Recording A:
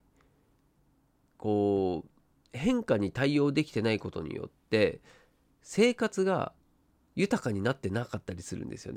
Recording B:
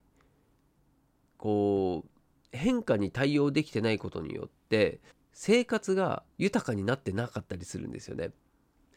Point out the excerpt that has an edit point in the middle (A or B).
B